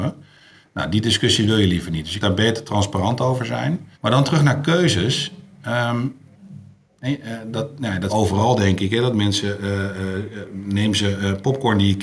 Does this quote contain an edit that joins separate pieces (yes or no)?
yes